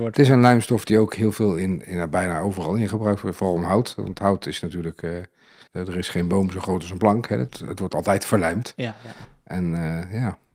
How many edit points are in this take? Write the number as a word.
one